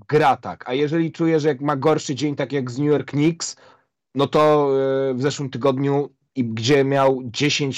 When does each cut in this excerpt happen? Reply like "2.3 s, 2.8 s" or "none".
none